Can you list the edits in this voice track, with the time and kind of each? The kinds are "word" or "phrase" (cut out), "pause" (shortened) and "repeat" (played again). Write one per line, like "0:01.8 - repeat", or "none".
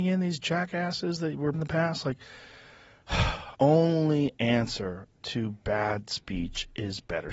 0:01.5 - word
0:03.5 - word